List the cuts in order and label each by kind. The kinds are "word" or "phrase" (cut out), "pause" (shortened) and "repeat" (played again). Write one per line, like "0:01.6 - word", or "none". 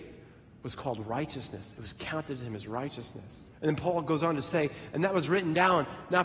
0:03.5 - pause